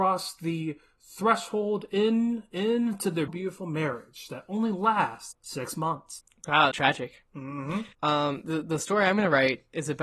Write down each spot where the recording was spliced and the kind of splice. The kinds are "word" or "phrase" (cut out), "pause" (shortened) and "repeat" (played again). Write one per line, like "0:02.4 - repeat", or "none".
0:03.3 - word
0:06.7 - word
0:07.9 - pause